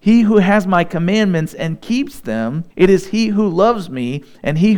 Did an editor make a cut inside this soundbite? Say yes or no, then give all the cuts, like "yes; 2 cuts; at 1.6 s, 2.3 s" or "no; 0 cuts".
yes; 1 cut; at 2.7 s